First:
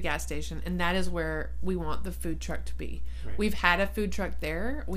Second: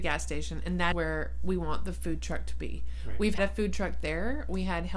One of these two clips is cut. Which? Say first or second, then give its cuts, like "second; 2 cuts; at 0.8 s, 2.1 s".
second; 2 cuts; at 0.9 s, 3.4 s